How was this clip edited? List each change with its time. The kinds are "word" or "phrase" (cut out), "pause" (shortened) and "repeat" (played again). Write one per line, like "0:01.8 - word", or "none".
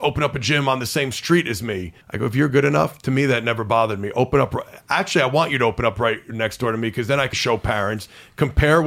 0:02.0 - pause
0:02.5 - phrase
0:07.3 - word